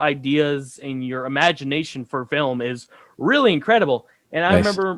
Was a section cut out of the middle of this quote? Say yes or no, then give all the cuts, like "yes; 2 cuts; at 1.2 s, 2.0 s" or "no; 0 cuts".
no; 0 cuts